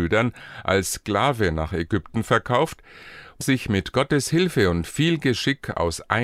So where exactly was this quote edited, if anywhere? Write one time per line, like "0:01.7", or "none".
0:03.4